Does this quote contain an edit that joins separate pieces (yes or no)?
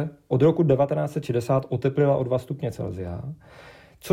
no